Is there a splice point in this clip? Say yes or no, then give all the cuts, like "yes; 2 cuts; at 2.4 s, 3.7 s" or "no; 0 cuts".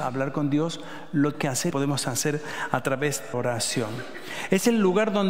yes; 3 cuts; at 1.3 s, 1.7 s, 3.3 s